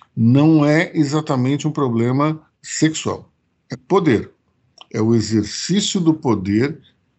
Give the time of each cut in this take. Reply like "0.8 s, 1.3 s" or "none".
2.5 s, 3.7 s